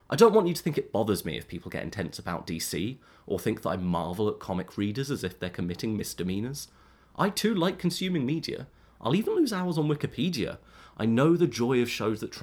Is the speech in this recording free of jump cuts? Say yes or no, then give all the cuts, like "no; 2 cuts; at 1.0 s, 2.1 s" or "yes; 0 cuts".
yes; 0 cuts